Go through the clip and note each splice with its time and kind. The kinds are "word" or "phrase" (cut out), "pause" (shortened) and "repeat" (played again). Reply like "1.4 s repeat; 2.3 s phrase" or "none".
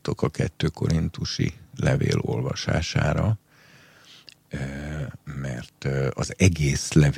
none